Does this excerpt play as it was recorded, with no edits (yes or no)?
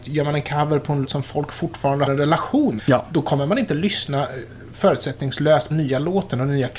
no